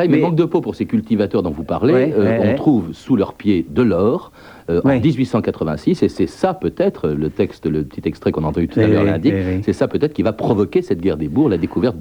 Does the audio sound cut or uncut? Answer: uncut